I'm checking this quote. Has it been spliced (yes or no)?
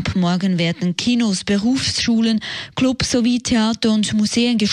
no